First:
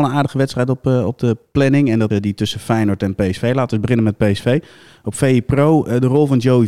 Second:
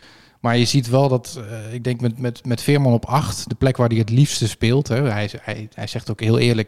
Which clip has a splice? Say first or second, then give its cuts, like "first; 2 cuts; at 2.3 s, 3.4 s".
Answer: first; 1 cut; at 2.1 s